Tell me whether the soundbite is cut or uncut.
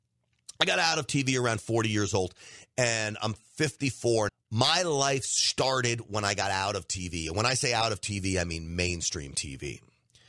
cut